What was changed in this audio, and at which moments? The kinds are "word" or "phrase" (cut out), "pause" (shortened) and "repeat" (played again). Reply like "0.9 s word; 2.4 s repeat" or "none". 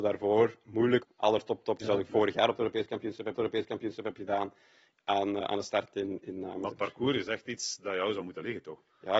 1.0 s phrase; 1.8 s word; 3.4 s repeat; 5.4 s word